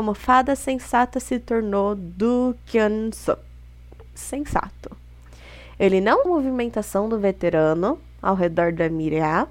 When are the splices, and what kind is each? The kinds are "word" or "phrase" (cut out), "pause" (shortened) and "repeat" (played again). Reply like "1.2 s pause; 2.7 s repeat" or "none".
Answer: 6.3 s phrase

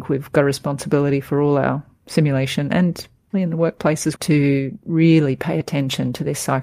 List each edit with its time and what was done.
3.3 s word; 4.2 s word

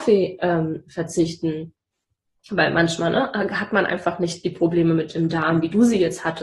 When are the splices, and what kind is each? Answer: none

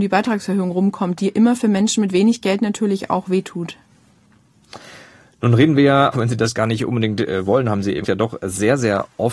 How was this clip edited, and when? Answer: 6.1 s word; 8.0 s word

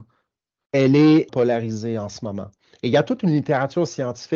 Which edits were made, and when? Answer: 1.3 s word

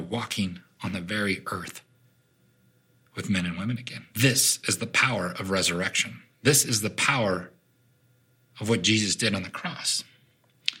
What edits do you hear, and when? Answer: 4.1 s pause

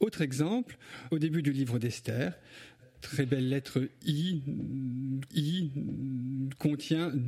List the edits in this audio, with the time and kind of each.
1.1 s word; 2.8 s word; 5.3 s repeat

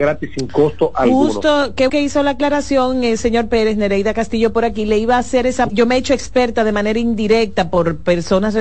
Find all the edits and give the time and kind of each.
1.9 s word; 5.7 s phrase

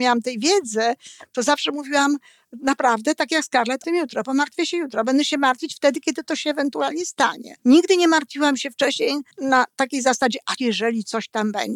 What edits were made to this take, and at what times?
3.8 s phrase; 7.6 s pause; 9.3 s pause; 10.6 s word

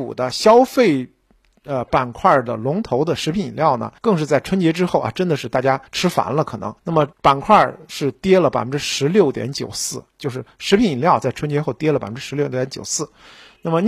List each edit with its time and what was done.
4.0 s pause; 5.9 s pause; 6.8 s pause; 7.1 s pause

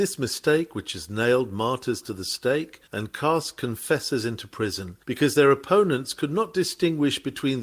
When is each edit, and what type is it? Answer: 2.9 s pause; 5.0 s pause

